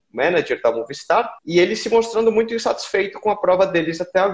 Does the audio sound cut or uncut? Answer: cut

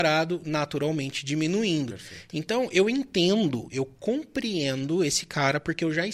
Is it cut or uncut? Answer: uncut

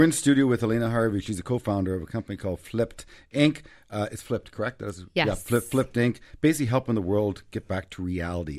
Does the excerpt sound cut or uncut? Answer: uncut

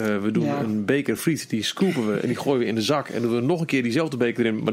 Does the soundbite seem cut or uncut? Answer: uncut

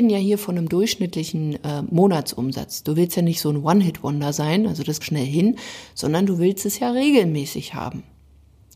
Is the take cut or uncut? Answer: cut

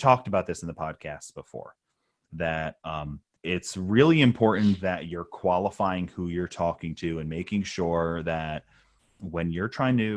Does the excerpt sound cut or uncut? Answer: cut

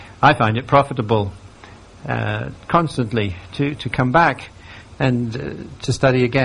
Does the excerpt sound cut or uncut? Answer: cut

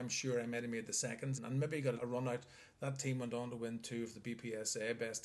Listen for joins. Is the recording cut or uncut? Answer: cut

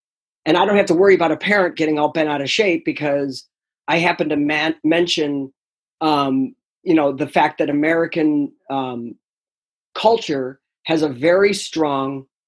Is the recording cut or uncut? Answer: uncut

